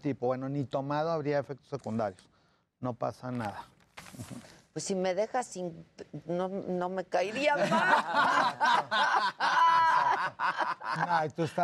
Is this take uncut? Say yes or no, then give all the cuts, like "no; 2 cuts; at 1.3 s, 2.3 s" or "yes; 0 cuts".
no; 1 cut; at 6.2 s